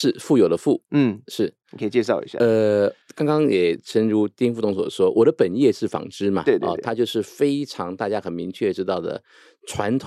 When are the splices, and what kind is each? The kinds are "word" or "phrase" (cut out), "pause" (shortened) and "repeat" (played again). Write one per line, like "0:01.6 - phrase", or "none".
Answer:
0:03.0 - pause